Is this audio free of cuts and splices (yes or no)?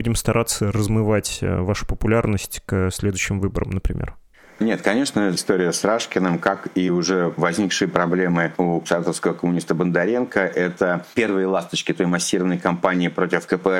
yes